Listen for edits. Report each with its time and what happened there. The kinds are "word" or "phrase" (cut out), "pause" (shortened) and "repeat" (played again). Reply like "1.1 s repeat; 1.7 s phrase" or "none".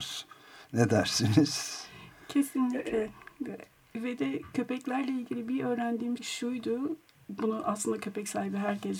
6.2 s word; 7.4 s word